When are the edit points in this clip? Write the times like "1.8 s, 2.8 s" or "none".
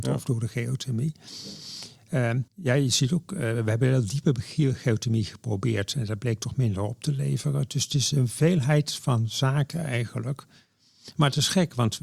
2.5 s